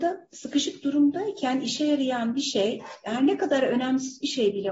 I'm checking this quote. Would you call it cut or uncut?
uncut